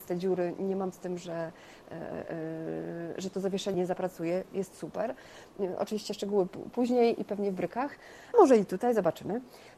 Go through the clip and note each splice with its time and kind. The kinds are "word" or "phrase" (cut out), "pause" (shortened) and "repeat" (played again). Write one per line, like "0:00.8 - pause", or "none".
0:00.9 - word
0:03.2 - word
0:03.7 - word
0:08.3 - word